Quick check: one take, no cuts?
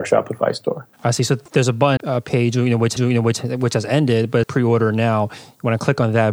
no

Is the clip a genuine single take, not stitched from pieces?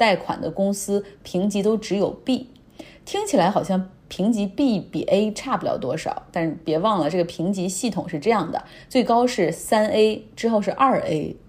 yes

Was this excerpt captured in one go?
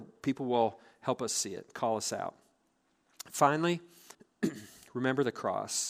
no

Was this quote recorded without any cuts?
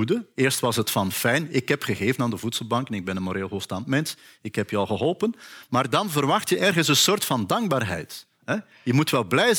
yes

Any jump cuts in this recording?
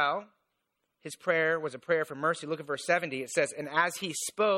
no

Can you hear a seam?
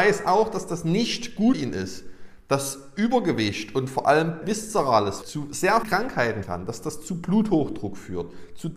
yes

